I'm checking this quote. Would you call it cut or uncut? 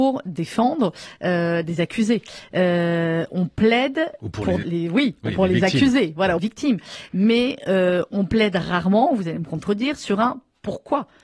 cut